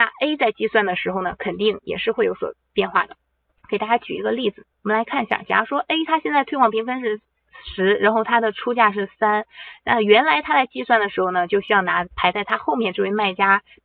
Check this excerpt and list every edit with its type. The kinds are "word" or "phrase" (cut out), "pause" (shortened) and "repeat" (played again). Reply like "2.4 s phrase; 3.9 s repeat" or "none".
3.4 s pause; 4.7 s pause